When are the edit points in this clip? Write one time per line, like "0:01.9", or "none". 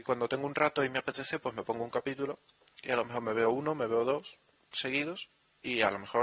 none